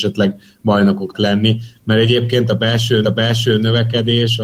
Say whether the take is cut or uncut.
cut